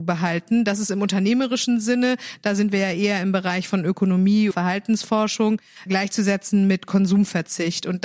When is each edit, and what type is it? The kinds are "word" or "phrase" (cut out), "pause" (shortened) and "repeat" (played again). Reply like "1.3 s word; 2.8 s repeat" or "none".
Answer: 4.5 s word; 5.9 s word